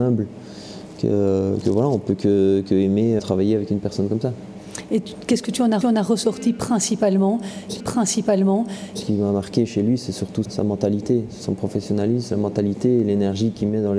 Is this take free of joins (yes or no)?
no